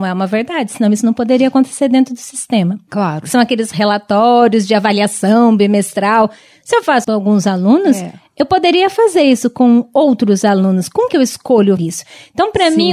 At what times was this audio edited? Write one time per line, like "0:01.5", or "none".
0:07.0
0:11.1
0:11.8